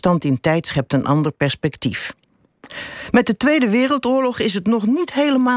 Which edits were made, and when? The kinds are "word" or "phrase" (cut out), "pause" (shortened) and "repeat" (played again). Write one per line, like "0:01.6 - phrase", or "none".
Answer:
none